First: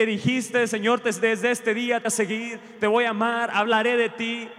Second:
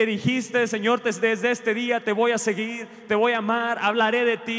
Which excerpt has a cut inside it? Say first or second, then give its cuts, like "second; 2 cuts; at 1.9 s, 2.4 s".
first; 1 cut; at 2.0 s